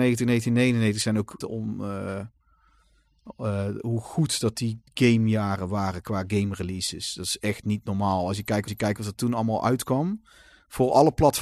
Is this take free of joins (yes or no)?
no